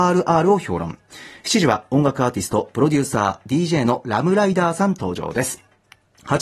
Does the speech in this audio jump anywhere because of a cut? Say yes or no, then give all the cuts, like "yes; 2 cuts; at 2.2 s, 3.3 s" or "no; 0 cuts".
no; 0 cuts